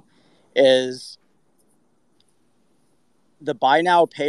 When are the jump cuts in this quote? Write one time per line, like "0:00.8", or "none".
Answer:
none